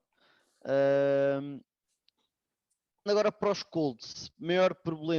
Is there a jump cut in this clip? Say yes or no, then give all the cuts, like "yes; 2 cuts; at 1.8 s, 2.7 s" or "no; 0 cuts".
yes; 1 cut; at 3.1 s